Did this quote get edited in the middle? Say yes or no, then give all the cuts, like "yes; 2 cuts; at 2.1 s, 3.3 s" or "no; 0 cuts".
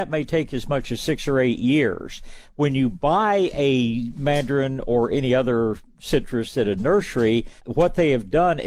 yes; 1 cut; at 7.6 s